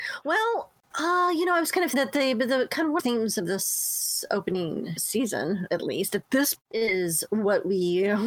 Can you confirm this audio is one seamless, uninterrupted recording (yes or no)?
no